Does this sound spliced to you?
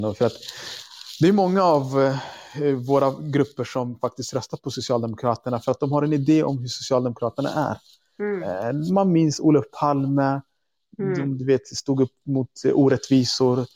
no; 0 cuts

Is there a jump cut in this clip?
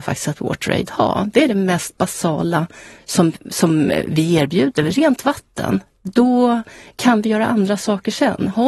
no; 0 cuts

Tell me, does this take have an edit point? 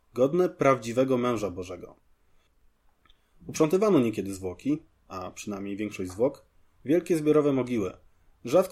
no; 0 cuts

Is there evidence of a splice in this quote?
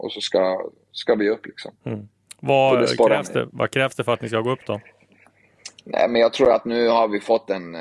yes; 1 cut; at 1.7 s

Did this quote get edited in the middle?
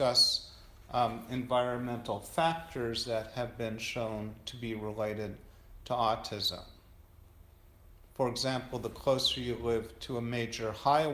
no; 0 cuts

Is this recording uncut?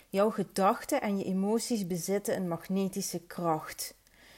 yes; 0 cuts

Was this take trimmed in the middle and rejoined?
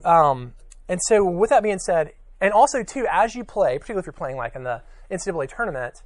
no; 0 cuts

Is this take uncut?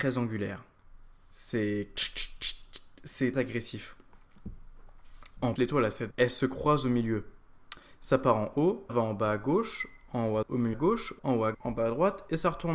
no; 8 cuts; at 3.3 s, 5.6 s, 6.1 s, 8.9 s, 10.4 s, 10.7 s, 11.2 s, 11.5 s

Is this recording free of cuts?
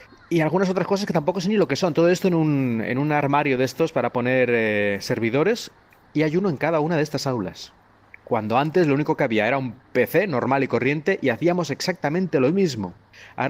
yes; 0 cuts

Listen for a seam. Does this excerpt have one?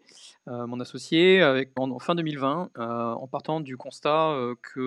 yes; 1 cut; at 1.8 s

